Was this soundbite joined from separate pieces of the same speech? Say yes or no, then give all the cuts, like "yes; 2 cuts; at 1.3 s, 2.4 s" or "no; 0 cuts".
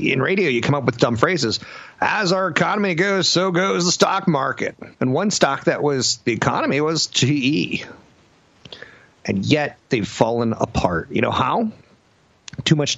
yes; 1 cut; at 4.9 s